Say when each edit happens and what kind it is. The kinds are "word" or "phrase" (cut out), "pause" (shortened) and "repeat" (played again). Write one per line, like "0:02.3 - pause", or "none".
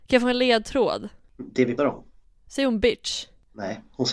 0:01.8 - word